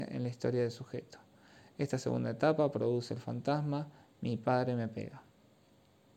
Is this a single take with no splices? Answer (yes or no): yes